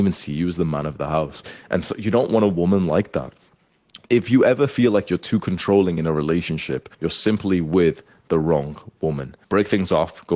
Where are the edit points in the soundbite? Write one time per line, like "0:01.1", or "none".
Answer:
0:06.9
0:09.4